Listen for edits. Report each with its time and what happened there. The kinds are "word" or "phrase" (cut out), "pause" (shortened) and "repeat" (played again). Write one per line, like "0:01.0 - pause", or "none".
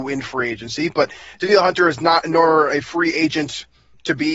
none